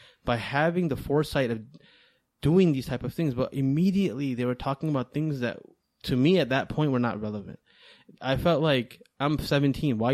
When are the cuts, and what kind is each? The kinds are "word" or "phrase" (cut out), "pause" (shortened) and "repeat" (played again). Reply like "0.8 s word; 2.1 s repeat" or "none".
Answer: none